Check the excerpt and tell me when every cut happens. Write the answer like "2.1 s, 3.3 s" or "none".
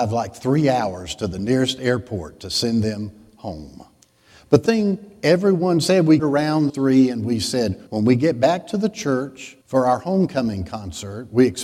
4.0 s, 4.7 s, 6.2 s, 6.7 s, 7.9 s, 9.6 s

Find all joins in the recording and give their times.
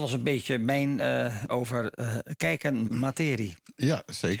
1.5 s, 2.9 s

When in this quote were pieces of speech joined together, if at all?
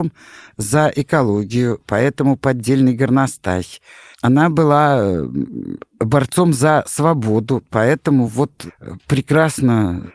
none

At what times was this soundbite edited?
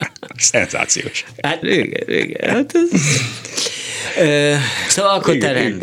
1.6 s, 4.9 s

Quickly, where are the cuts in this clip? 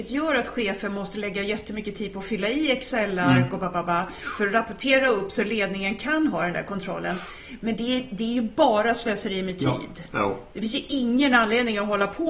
none

